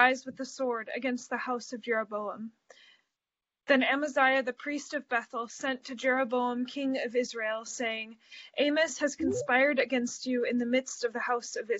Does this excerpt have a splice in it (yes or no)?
no